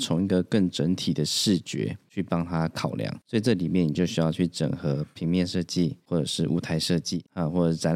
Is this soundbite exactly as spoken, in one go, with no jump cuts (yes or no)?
yes